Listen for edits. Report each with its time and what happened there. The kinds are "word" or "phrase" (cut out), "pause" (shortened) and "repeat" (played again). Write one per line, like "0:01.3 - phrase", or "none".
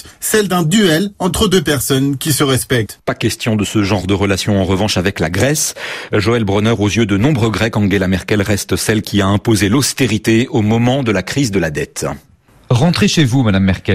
none